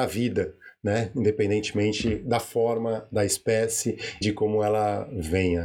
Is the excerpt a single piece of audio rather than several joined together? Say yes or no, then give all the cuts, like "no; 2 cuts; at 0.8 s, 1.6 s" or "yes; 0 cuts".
no; 1 cut; at 4.2 s